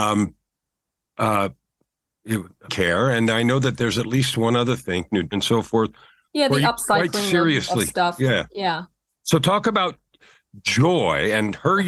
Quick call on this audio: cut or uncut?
cut